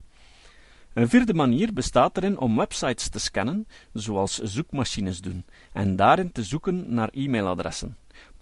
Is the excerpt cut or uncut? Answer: uncut